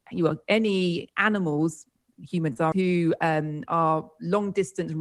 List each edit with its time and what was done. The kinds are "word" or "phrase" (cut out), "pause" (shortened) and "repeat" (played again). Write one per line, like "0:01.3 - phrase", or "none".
0:02.7 - word